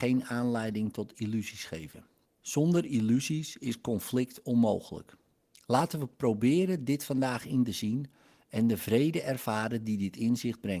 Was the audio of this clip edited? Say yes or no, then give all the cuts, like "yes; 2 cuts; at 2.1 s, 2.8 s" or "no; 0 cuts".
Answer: no; 0 cuts